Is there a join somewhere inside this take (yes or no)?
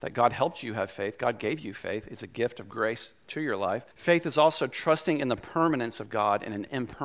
yes